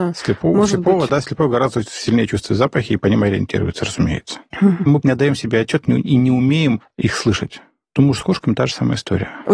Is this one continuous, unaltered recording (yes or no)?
no